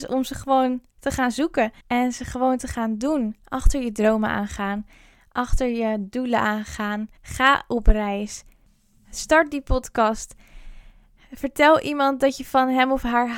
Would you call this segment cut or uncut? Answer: cut